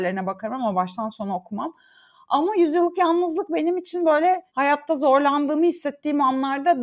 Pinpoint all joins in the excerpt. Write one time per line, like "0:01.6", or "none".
0:04.5